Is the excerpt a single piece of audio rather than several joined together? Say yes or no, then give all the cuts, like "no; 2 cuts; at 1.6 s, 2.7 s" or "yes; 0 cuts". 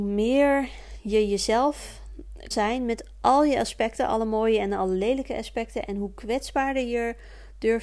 no; 1 cut; at 2.5 s